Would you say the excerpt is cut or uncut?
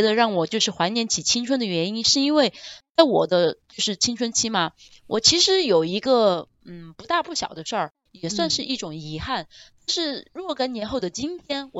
uncut